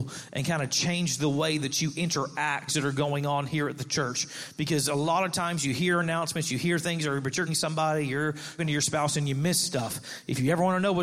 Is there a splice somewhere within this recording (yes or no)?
yes